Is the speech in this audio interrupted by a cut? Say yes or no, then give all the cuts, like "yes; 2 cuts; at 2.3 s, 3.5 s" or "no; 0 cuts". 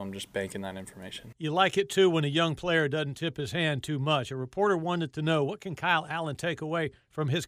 no; 0 cuts